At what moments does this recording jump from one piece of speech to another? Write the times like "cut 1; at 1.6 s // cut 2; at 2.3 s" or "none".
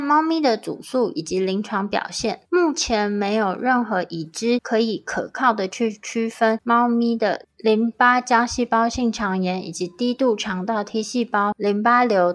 cut 1; at 2.4 s